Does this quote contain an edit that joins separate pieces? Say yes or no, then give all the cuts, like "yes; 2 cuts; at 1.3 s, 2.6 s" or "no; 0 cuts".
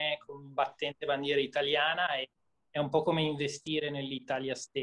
no; 0 cuts